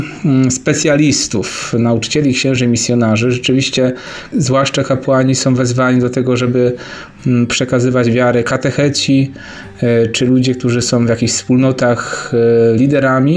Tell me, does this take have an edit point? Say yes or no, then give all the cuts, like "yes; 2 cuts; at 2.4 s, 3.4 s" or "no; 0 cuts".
yes; 1 cut; at 4.3 s